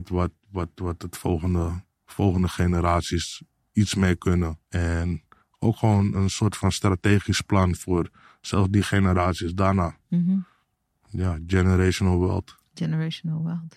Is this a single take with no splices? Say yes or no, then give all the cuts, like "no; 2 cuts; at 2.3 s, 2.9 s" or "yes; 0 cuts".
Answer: no; 1 cut; at 4.6 s